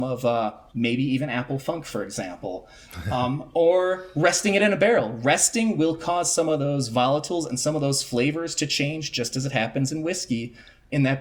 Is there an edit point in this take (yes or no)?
no